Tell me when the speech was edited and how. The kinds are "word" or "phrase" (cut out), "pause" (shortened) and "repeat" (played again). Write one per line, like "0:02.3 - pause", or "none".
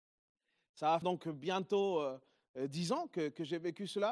0:01.0 - word

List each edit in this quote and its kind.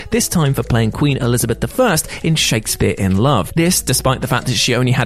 none

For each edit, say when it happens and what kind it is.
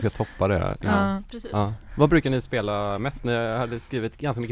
none

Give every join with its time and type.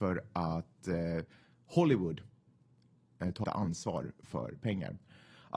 0:03.4 - word

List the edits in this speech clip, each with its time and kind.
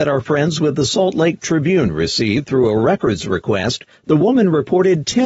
none

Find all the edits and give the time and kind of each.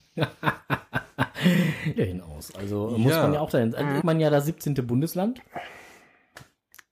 0:02.0 - phrase
0:04.0 - phrase

